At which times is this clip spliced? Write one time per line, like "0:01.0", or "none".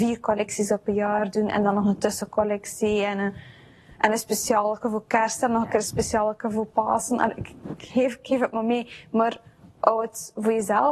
none